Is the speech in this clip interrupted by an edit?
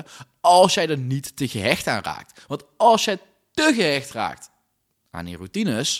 no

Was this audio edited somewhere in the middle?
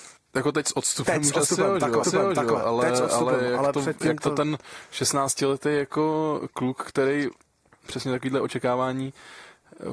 yes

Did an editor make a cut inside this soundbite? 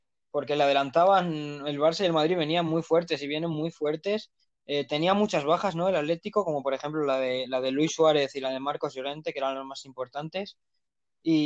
no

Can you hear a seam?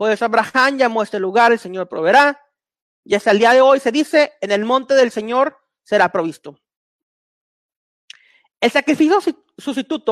no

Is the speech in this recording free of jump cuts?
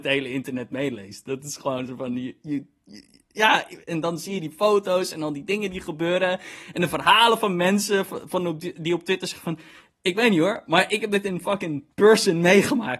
no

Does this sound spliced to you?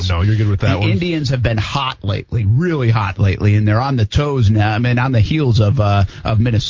no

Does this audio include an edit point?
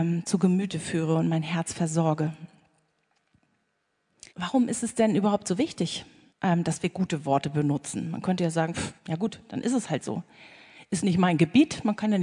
yes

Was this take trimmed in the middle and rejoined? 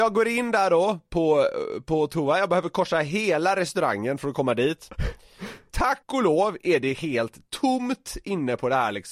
yes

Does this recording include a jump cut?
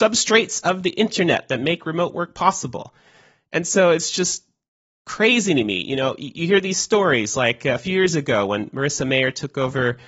no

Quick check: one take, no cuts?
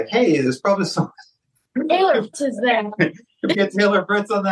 no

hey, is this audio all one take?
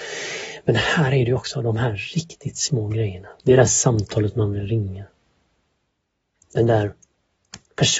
no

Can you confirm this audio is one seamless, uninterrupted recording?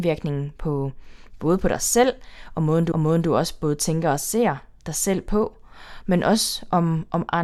no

